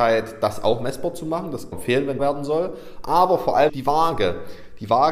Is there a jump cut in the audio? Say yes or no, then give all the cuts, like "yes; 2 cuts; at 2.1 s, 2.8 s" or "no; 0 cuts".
yes; 3 cuts; at 1.7 s, 2.2 s, 3.7 s